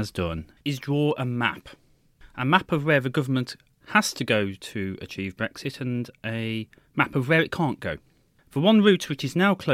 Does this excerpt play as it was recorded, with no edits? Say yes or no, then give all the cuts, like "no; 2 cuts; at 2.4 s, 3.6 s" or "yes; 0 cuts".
yes; 0 cuts